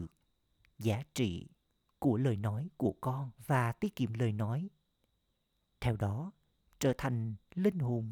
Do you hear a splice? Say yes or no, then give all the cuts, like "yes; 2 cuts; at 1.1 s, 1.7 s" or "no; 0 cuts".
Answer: yes; 1 cut; at 3.4 s